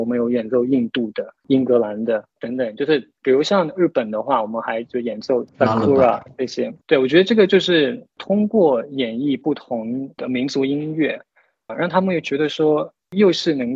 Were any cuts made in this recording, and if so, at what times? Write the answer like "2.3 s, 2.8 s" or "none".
3.2 s, 6.8 s, 11.7 s